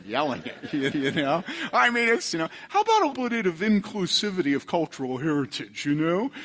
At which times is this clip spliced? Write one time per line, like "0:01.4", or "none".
0:00.9
0:02.3
0:03.1